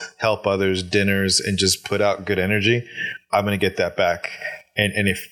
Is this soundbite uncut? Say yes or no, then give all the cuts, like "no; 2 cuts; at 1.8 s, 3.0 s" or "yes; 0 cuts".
yes; 0 cuts